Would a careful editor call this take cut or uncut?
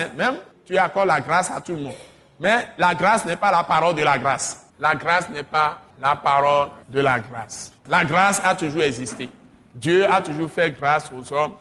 cut